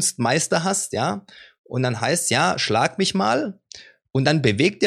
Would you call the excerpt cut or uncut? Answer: uncut